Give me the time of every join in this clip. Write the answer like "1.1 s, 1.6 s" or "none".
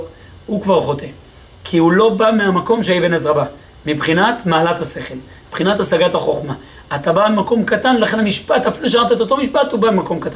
none